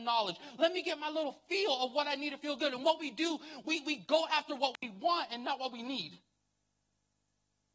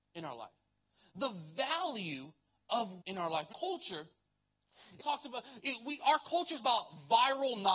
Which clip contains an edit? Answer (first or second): second